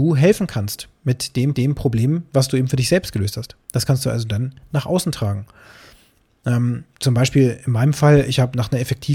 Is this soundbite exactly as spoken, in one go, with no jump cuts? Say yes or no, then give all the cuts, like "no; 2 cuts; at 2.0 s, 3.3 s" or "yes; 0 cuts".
no; 3 cuts; at 1.5 s, 3.6 s, 6.9 s